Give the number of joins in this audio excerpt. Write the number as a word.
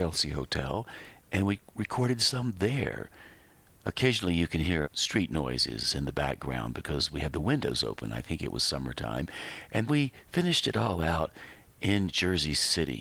two